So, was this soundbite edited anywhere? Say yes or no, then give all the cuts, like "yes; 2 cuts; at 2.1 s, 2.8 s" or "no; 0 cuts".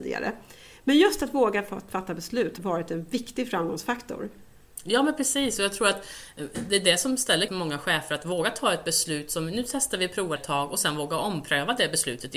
yes; 3 cuts; at 2.6 s, 7.5 s, 10.4 s